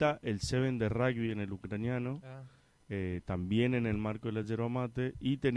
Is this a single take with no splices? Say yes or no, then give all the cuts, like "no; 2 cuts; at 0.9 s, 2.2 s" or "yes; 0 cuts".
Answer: yes; 0 cuts